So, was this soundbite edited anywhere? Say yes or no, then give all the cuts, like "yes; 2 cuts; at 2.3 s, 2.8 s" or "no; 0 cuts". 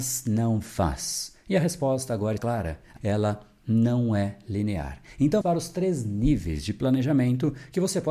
yes; 3 cuts; at 2.4 s, 3.0 s, 5.4 s